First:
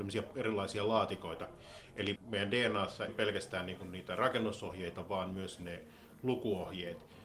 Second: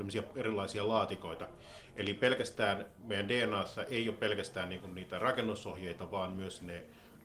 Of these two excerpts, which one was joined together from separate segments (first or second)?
first